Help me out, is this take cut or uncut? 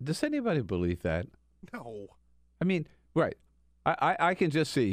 uncut